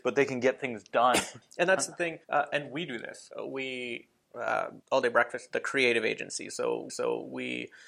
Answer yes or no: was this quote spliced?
yes